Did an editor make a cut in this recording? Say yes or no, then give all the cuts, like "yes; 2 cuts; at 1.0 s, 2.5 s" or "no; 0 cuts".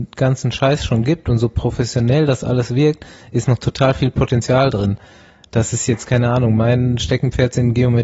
no; 0 cuts